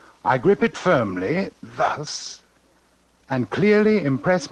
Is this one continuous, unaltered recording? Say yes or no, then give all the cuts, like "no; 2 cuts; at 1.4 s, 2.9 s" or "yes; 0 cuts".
yes; 0 cuts